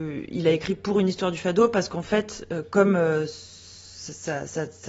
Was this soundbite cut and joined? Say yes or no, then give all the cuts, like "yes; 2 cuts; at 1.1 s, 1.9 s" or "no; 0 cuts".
no; 0 cuts